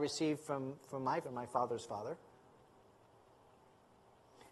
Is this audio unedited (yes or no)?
no